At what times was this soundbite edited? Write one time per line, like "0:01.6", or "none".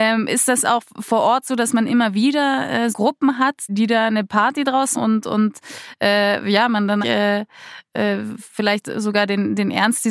0:02.9
0:03.7
0:04.9
0:07.0